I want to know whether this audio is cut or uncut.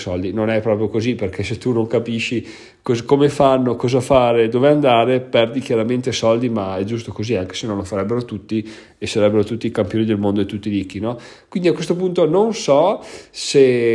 uncut